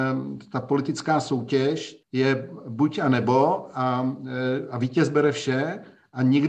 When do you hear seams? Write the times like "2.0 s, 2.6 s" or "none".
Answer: 2.0 s